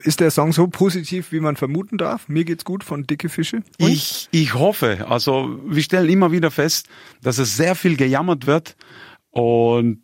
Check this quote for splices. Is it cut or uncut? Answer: uncut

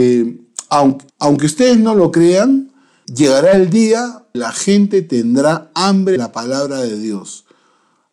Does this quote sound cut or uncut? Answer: cut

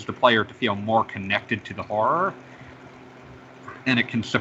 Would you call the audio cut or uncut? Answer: uncut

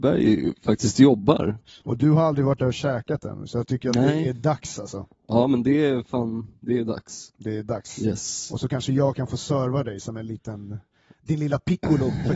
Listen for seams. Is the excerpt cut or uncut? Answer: uncut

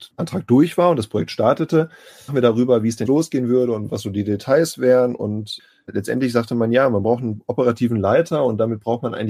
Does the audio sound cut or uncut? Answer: cut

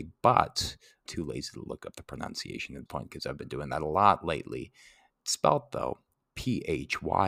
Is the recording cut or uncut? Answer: cut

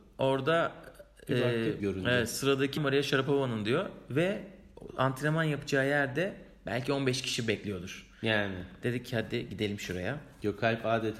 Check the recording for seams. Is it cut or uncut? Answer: cut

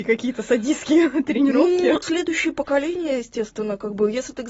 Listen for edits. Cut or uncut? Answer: cut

